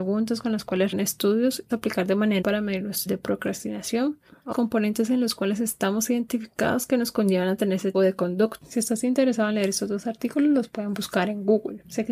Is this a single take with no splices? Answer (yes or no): no